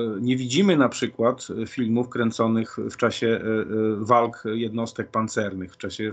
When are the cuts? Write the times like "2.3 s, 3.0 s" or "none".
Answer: none